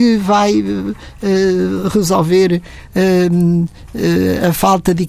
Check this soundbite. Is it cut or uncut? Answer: uncut